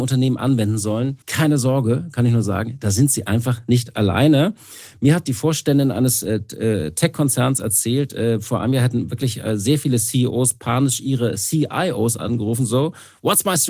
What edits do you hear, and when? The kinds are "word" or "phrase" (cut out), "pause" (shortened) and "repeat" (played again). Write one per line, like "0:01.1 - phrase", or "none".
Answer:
0:01.2 - pause